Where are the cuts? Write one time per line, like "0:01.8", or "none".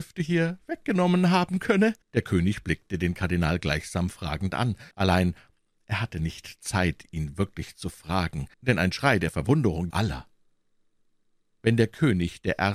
0:02.0
0:04.9
0:08.5
0:09.9